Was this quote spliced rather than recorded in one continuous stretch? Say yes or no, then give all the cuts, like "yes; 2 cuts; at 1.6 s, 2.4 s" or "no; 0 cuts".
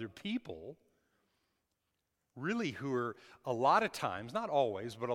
no; 0 cuts